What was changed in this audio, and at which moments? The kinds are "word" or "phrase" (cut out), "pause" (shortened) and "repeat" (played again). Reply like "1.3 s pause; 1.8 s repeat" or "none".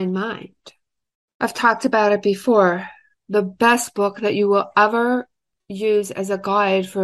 none